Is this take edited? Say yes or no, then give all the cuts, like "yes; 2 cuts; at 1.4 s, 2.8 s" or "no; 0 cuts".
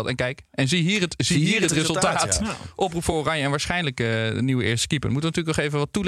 no; 0 cuts